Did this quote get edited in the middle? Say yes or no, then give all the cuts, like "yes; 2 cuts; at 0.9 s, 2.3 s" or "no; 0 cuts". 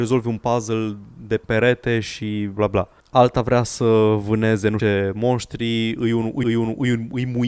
yes; 4 cuts; at 1.4 s, 2.6 s, 4.8 s, 6.4 s